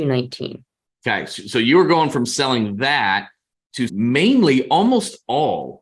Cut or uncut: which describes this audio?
cut